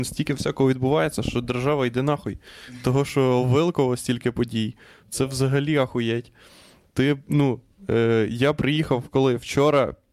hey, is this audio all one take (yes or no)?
yes